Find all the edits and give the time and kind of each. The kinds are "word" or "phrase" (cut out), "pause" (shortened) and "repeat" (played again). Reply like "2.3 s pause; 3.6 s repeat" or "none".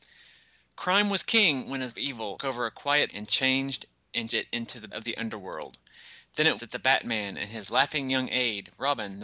1.9 s word; 2.4 s word; 3.1 s word; 4.3 s word; 4.9 s word; 6.6 s word